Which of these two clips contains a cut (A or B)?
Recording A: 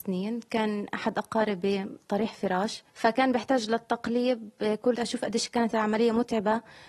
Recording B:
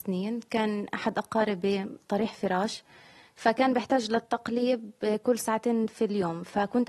A